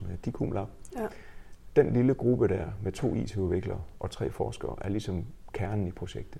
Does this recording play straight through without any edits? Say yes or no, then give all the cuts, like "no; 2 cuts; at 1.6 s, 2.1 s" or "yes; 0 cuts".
yes; 0 cuts